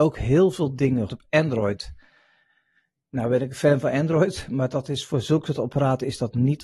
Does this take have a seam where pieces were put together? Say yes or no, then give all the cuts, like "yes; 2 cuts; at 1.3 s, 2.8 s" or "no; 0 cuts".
yes; 1 cut; at 1.1 s